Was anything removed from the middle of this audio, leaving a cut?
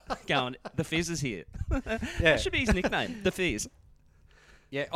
no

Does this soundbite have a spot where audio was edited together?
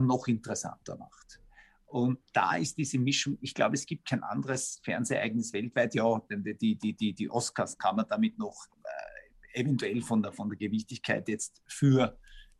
no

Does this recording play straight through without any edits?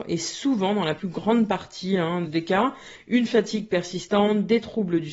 no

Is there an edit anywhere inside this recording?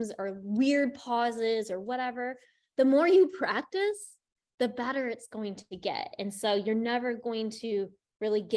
no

